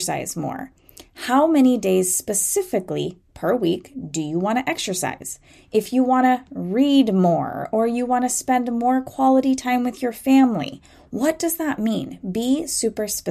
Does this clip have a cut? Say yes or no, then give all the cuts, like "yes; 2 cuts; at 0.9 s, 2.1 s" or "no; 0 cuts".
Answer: no; 0 cuts